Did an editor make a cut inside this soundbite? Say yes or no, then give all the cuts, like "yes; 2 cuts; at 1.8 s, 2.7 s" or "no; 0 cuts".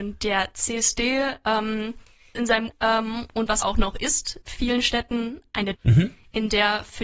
yes; 5 cuts; at 2.3 s, 2.7 s, 3.6 s, 4.4 s, 5.7 s